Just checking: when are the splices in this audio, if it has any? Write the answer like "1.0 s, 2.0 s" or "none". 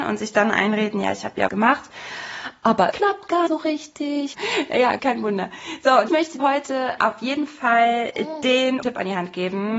1.5 s, 2.9 s, 3.5 s, 4.3 s, 5.0 s, 6.1 s, 6.4 s, 7.0 s, 8.8 s

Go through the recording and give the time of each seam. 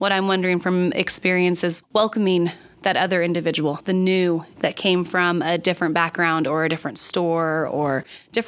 1.8 s, 4.6 s

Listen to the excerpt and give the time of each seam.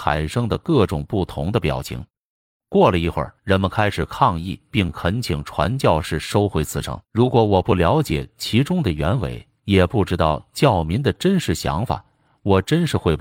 3.4 s, 7.0 s, 9.6 s

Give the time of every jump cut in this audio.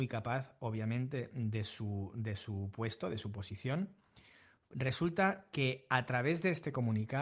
none

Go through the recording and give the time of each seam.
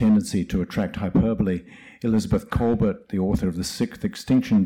none

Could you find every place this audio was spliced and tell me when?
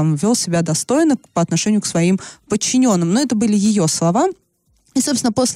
none

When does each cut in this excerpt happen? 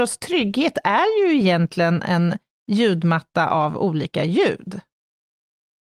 none

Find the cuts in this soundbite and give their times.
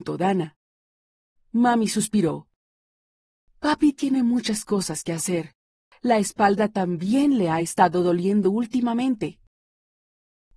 none

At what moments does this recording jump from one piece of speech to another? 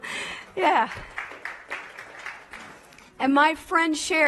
none

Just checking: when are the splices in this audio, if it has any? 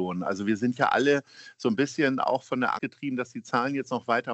2.8 s

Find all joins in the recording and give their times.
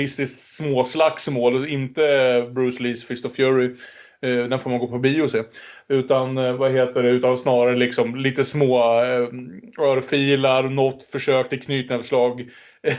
none

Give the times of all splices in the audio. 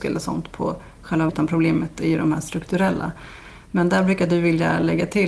1.3 s

